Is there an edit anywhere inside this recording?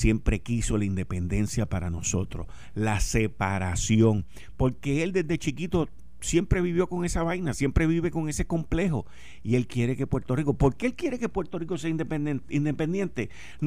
no; 0 cuts

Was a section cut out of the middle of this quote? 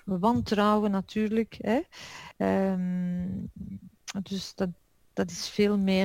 no; 0 cuts

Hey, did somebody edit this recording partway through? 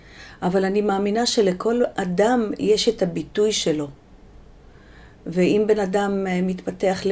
no; 0 cuts

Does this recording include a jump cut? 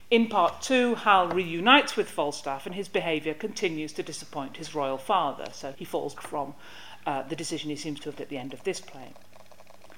yes; 3 cuts; at 5.7 s, 6.2 s, 8.2 s

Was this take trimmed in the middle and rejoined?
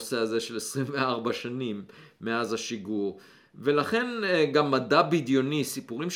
no; 0 cuts

